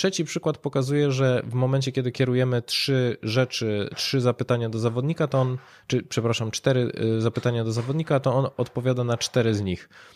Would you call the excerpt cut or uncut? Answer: uncut